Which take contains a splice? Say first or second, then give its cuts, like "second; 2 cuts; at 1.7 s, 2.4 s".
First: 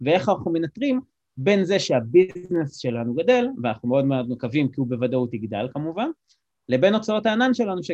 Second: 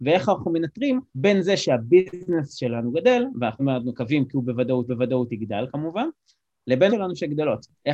second; 4 cuts; at 1.1 s, 3.6 s, 4.9 s, 6.9 s